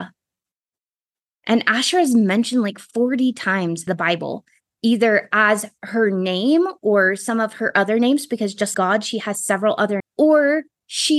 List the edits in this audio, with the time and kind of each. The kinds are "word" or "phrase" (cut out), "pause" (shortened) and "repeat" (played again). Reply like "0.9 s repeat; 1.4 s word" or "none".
3.9 s word; 8.7 s word; 10.0 s word

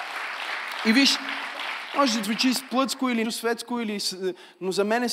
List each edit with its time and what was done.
2.2 s word; 3.2 s word

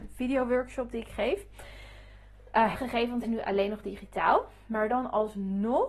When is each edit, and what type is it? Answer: 2.7 s word; 3.2 s word

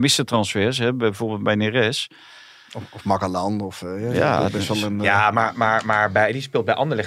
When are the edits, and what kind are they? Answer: none

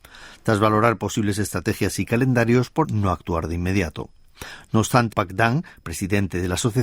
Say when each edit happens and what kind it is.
2.8 s phrase; 5.1 s word

